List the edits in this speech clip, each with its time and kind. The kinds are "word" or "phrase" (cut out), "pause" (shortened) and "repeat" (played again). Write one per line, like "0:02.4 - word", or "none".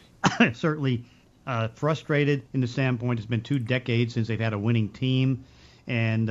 0:02.5 - pause